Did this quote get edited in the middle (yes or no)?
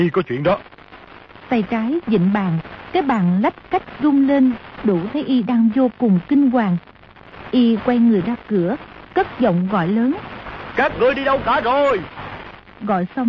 no